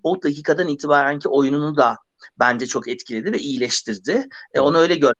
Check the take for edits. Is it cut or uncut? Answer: uncut